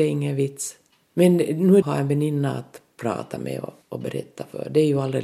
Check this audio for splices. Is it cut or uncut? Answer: cut